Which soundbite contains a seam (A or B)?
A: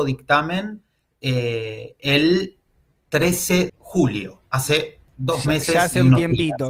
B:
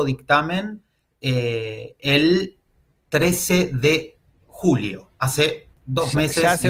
A